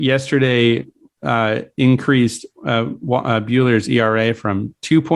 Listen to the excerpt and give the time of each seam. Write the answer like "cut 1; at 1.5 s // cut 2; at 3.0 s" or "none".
none